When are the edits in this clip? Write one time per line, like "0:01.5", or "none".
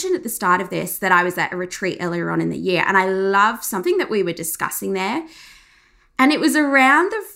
none